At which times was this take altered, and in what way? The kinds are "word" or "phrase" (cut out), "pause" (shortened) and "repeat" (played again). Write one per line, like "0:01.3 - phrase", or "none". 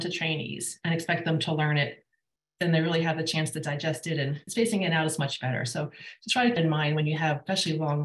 0:04.5 - word
0:06.6 - phrase